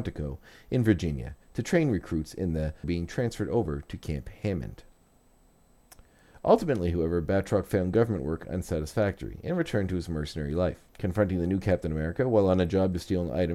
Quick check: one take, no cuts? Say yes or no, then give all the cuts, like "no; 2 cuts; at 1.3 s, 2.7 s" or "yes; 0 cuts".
no; 3 cuts; at 1.4 s, 2.8 s, 10.9 s